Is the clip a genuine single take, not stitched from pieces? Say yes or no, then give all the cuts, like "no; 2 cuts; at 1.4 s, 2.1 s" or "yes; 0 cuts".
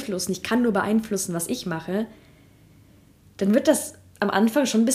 yes; 0 cuts